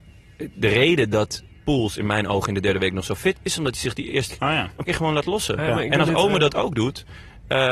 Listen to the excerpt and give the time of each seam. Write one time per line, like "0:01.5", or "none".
0:03.3
0:04.3
0:04.9